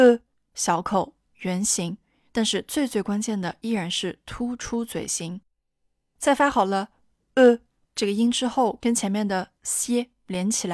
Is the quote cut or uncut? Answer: uncut